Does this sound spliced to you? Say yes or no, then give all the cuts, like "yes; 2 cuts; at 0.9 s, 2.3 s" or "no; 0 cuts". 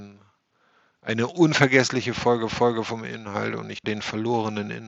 yes; 2 cuts; at 2.5 s, 3.8 s